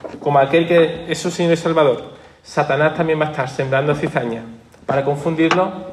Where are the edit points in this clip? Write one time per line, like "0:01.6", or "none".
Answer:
none